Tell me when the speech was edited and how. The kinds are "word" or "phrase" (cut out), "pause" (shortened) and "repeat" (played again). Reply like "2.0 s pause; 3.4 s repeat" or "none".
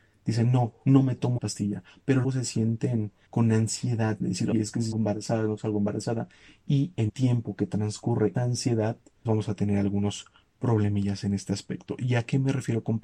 1.4 s word; 2.2 s word; 3.3 s word; 4.2 s word; 4.5 s word; 4.9 s word; 7.1 s word; 8.3 s word; 9.3 s word